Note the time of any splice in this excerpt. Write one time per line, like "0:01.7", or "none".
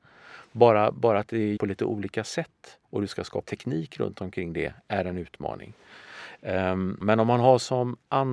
0:00.9
0:01.6
0:02.8
0:03.4